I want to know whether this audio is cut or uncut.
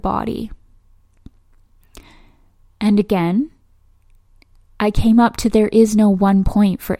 uncut